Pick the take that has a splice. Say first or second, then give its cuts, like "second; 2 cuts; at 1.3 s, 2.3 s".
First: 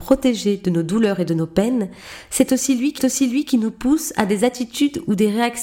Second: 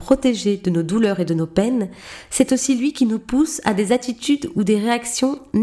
first; 1 cut; at 3.0 s